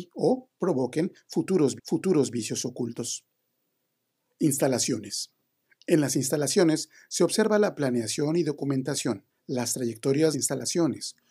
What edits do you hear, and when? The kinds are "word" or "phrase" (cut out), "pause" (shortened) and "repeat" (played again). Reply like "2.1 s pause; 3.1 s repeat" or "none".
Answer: 1.8 s repeat; 5.6 s pause; 9.3 s pause; 10.3 s phrase